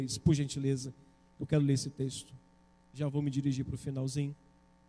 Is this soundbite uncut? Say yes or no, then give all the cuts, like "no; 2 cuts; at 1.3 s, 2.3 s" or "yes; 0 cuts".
yes; 0 cuts